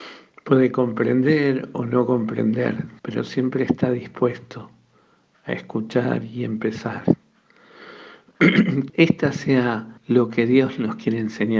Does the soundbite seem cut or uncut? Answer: cut